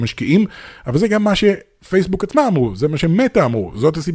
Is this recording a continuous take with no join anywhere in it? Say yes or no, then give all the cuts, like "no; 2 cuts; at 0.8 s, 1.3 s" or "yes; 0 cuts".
yes; 0 cuts